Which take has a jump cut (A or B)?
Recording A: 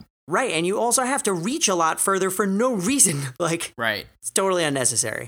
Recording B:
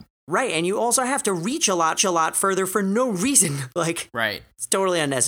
B